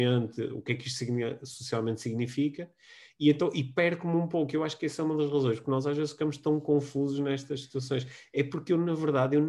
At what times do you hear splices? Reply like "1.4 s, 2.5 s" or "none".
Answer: none